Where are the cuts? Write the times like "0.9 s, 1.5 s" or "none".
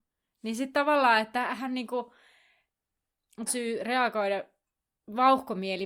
3.5 s